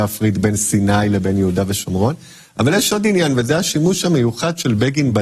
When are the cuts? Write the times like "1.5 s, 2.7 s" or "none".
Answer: none